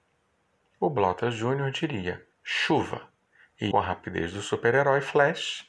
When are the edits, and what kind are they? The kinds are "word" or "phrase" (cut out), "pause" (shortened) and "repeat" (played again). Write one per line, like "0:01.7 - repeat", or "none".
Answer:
0:02.3 - pause
0:03.7 - phrase

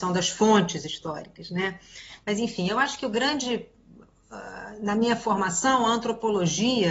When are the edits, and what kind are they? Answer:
none

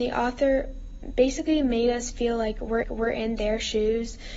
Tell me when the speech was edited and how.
0:02.8 - repeat

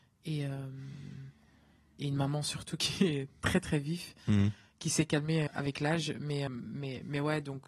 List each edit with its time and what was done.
0:05.5 - word
0:06.5 - word

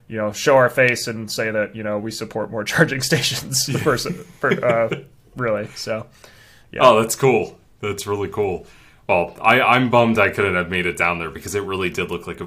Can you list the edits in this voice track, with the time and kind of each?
none

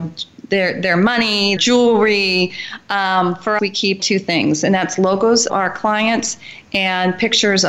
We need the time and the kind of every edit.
0:01.6 - word
0:03.6 - word
0:04.0 - word
0:05.5 - word

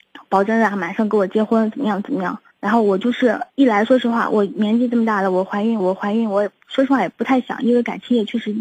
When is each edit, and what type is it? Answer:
0:02.5 - pause
0:03.5 - pause
0:05.8 - repeat

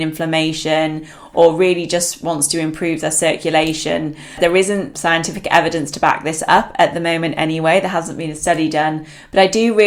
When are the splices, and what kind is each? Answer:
none

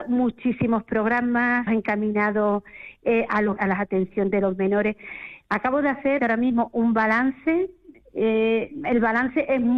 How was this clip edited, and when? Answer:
0:01.7 - word
0:03.6 - word
0:06.2 - word

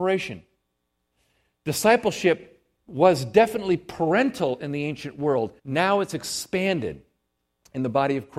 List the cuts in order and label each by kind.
0:05.6 - pause

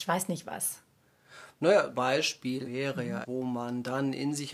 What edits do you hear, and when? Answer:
0:01.9 - word
0:02.6 - word
0:03.2 - word

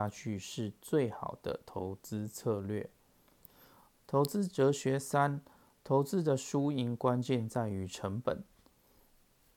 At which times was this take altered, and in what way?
none

